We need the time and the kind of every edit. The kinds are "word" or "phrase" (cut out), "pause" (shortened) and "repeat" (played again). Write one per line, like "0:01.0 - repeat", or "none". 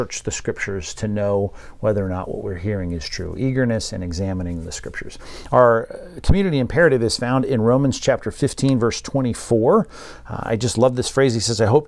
none